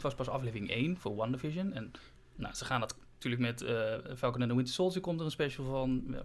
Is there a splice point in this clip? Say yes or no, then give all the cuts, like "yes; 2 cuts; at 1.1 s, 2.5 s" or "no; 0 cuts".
no; 0 cuts